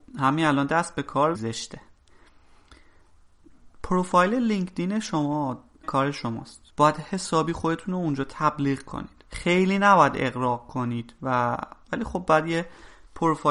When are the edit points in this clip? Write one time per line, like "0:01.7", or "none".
0:01.3
0:05.8
0:06.7
0:09.3